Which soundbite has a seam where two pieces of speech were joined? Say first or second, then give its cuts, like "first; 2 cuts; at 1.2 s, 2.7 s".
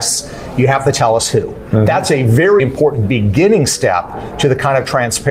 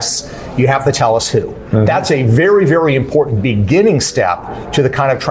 first; 1 cut; at 2.6 s